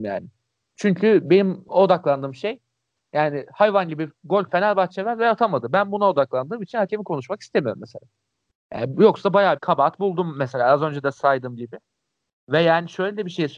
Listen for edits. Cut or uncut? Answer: cut